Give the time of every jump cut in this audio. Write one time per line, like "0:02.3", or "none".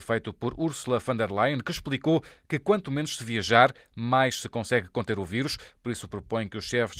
none

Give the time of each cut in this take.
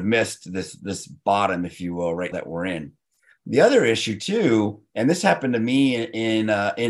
0:02.3

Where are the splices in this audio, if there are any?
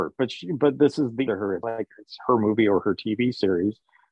0:01.3
0:01.6

